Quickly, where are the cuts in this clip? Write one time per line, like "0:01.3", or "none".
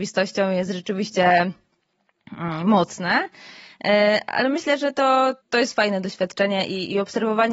0:05.4